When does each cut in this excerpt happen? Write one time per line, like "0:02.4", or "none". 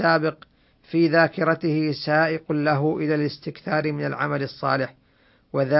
none